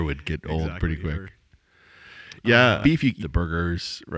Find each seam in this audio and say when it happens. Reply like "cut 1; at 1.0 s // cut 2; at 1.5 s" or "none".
cut 1; at 2.8 s // cut 2; at 3.2 s